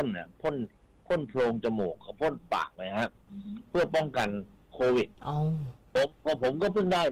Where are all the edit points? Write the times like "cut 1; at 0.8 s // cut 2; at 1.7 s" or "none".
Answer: cut 1; at 5.1 s